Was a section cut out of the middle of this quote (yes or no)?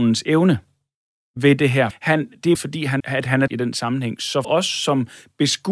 yes